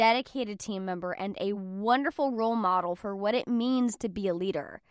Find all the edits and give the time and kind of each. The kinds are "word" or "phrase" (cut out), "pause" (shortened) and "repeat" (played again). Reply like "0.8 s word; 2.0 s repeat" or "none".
none